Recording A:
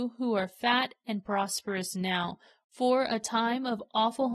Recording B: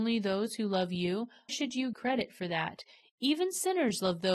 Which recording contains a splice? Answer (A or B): B